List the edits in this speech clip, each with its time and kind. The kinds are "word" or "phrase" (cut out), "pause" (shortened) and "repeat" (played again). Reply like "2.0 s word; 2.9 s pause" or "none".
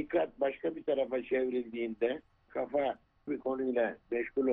2.5 s word; 3.3 s word